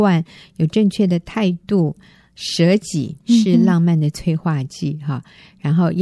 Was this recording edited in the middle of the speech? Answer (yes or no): yes